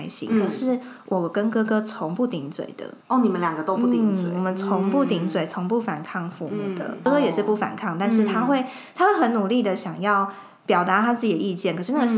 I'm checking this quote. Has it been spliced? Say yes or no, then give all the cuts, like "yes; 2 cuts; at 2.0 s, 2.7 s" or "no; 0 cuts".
yes; 2 cuts; at 3.0 s, 10.6 s